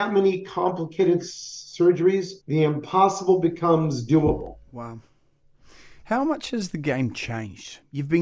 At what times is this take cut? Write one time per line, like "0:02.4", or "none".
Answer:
0:02.4